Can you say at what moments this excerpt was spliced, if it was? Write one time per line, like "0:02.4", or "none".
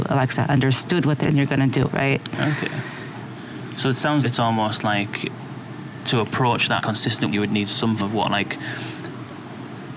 0:01.2
0:01.8
0:04.2
0:06.8
0:07.3
0:08.0